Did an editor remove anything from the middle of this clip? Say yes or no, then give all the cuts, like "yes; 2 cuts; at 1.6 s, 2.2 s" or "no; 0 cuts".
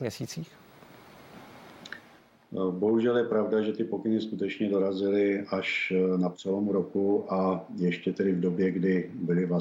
no; 0 cuts